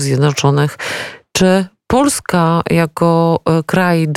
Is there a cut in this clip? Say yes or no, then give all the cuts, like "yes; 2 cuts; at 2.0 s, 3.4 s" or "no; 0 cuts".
no; 0 cuts